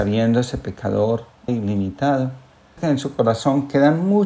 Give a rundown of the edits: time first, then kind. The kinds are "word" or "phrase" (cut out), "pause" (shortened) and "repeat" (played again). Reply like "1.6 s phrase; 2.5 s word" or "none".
1.5 s word; 2.8 s word

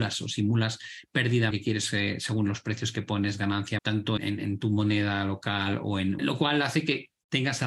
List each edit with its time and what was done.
1.5 s word; 3.8 s word; 4.2 s word; 6.2 s phrase

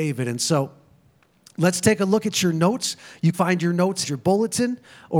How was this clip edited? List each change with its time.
3.3 s word; 4.0 s word

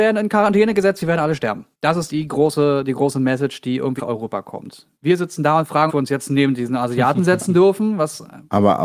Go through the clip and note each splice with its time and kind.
1.7 s pause; 2.1 s word; 4.0 s word; 4.9 s pause; 5.9 s phrase

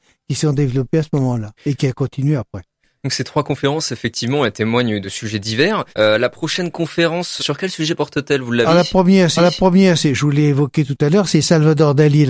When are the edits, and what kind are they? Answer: 1.6 s pause; 5.0 s phrase; 5.9 s pause; 7.4 s word; 8.7 s word; 9.4 s repeat

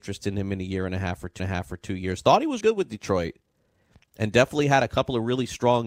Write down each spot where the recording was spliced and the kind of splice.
1.4 s repeat; 2.6 s word

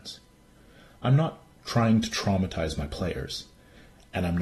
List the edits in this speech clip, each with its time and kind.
none

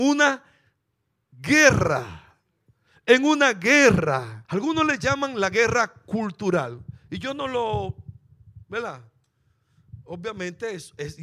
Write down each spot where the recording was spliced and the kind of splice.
4.4 s pause

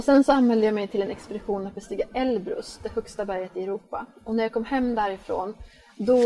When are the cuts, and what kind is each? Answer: none

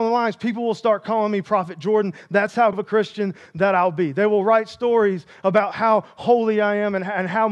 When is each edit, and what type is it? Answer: 2.7 s word

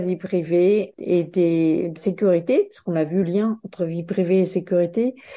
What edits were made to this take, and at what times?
0.9 s word; 2.0 s word; 3.2 s word

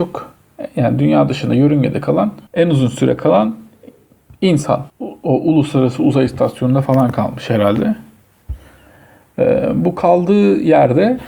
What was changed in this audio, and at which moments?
2.5 s pause; 4.9 s pause

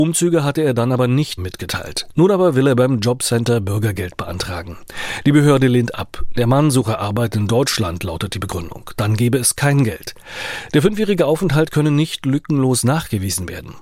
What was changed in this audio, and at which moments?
1.4 s word

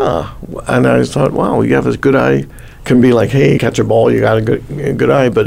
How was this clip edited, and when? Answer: 3.6 s word

